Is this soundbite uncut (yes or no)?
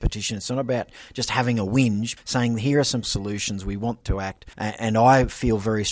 no